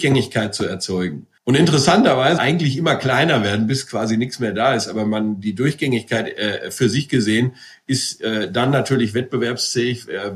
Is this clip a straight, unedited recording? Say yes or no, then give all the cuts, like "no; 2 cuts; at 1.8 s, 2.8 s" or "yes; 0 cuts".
no; 2 cuts; at 1.4 s, 2.4 s